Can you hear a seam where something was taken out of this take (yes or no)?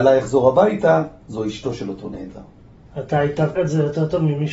yes